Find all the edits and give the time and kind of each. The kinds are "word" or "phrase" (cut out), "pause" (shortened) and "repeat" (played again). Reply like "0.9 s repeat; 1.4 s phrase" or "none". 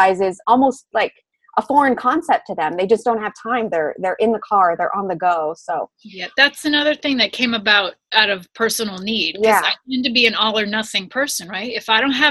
none